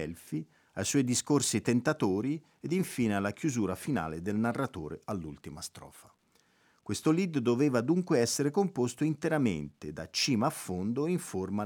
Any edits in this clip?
no; 0 cuts

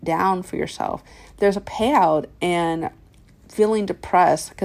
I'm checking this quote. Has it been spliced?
no; 0 cuts

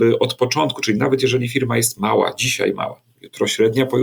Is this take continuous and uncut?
yes; 0 cuts

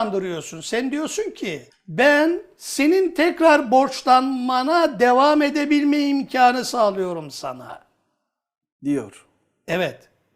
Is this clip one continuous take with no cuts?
no; 1 cut; at 1.7 s

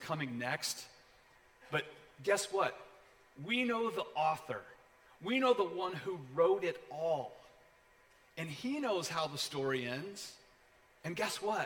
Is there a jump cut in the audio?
no; 0 cuts

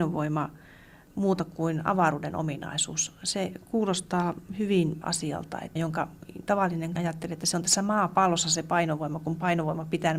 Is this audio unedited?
no; 3 cuts; at 5.0 s, 5.8 s, 7.0 s

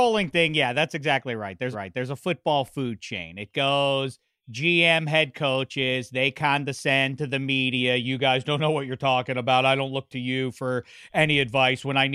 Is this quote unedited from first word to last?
no; 1 cut; at 1.7 s

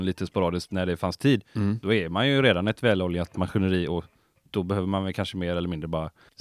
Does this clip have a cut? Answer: no; 0 cuts

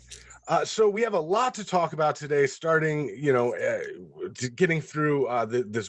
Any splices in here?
no; 0 cuts

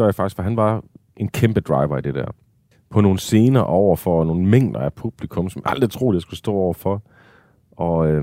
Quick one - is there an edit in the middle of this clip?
no; 0 cuts

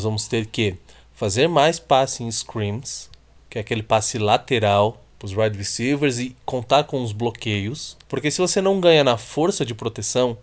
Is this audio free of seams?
no; 2 cuts; at 3.4 s, 8.0 s

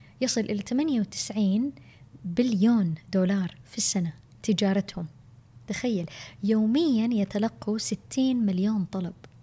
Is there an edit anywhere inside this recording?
no; 0 cuts

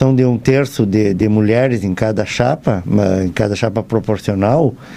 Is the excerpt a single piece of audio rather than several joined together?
yes; 0 cuts

